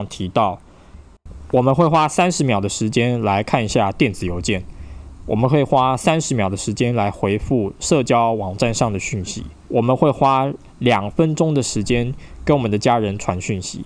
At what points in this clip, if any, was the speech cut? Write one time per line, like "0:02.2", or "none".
0:09.6